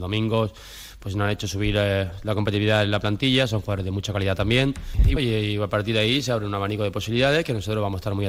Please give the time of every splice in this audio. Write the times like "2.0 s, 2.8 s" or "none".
5.2 s